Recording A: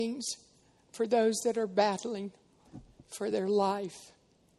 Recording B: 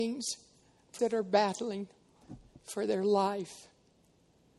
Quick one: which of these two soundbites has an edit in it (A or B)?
B